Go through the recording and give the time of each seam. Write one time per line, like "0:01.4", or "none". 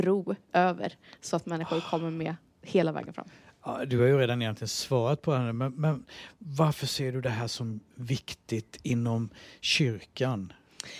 none